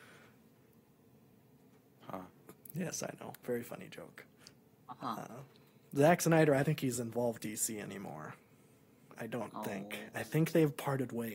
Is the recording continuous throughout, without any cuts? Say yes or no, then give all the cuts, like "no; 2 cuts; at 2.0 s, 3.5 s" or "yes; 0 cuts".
no; 2 cuts; at 6.6 s, 7.4 s